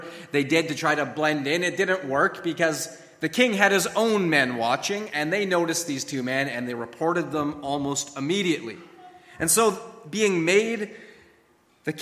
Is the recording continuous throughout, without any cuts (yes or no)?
yes